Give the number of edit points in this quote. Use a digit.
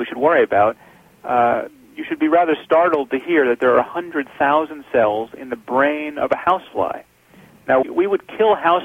1